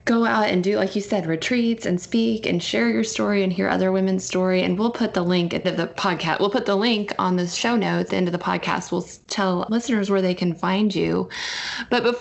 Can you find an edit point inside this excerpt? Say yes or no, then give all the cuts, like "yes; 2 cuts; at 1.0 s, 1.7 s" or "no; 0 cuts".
yes; 3 cuts; at 5.6 s, 8.1 s, 9.7 s